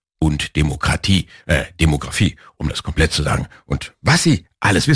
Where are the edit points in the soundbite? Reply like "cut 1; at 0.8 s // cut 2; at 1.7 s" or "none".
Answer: none